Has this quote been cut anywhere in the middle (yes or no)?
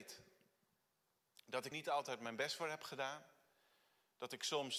yes